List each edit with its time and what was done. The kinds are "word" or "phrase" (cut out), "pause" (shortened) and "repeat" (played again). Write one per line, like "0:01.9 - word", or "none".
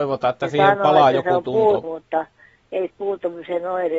0:01.8 - word
0:02.9 - word